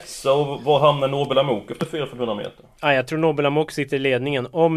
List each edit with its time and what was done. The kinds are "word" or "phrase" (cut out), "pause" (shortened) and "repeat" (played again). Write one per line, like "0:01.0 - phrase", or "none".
none